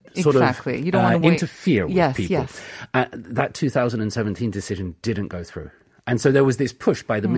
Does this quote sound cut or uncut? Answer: uncut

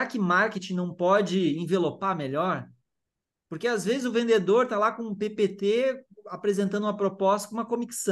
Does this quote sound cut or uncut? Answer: uncut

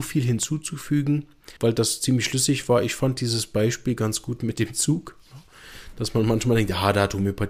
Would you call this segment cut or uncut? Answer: cut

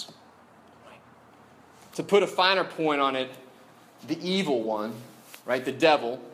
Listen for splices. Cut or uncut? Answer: uncut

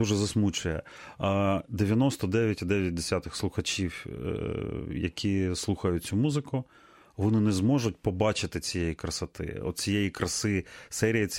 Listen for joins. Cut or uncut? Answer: uncut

